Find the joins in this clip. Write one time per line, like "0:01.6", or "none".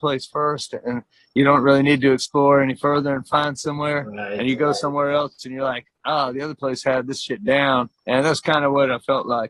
0:08.0